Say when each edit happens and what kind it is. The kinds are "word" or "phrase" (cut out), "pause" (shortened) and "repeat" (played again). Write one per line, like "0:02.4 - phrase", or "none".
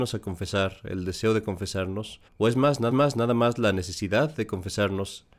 0:02.3 - pause
0:02.9 - repeat